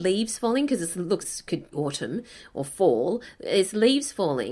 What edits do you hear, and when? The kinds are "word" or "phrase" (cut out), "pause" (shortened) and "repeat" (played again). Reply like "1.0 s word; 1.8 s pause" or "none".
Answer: 1.2 s word; 1.7 s word